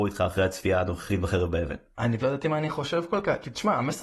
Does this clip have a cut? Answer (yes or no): yes